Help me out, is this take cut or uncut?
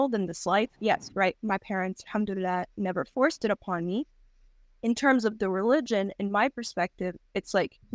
uncut